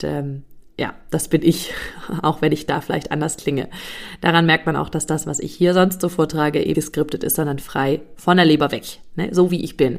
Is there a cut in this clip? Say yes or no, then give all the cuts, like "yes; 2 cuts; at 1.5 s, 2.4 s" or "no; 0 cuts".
yes; 1 cut; at 6.7 s